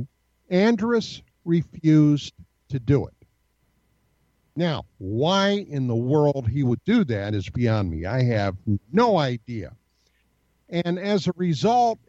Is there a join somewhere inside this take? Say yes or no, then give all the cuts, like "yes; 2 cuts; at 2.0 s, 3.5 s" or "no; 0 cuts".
no; 0 cuts